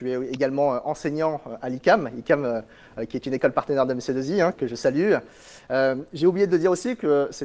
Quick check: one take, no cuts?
no; 1 cut; at 4.5 s

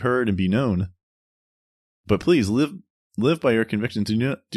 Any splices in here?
no; 0 cuts

